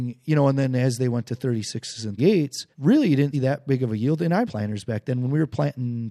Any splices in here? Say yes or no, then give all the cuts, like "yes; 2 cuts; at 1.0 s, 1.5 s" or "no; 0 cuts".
yes; 4 cuts; at 2.2 s, 2.7 s, 3.3 s, 4.4 s